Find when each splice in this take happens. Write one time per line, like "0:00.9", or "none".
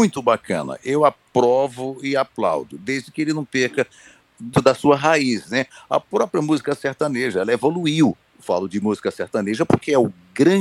0:04.5